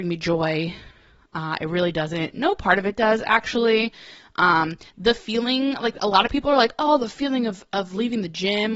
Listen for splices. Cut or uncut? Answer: uncut